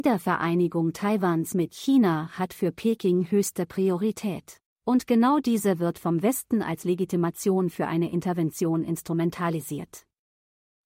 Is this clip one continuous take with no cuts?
no; 1 cut; at 4.7 s

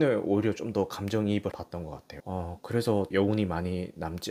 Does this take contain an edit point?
yes; 1 cut; at 1.5 s

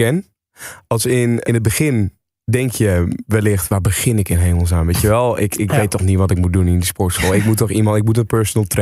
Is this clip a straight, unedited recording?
no; 2 cuts; at 1.4 s, 5.5 s

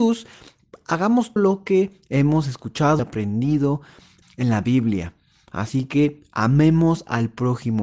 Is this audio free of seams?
no; 3 cuts; at 1.4 s, 3.0 s, 4.2 s

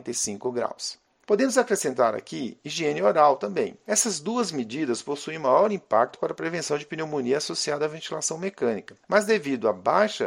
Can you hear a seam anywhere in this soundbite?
no; 0 cuts

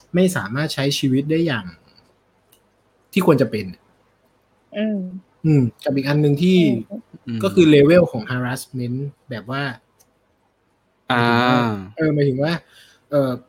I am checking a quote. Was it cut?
no; 0 cuts

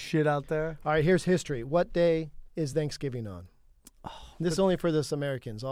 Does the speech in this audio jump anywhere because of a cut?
no; 0 cuts

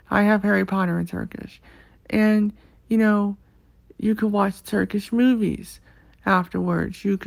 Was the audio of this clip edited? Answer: no; 0 cuts

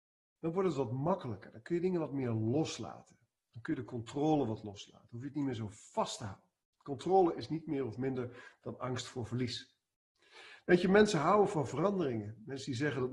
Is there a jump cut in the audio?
no; 0 cuts

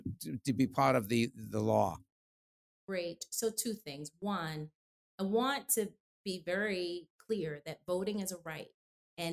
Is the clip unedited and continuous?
yes; 0 cuts

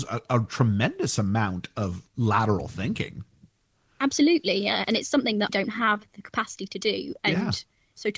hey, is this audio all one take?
no; 2 cuts; at 2.1 s, 5.5 s

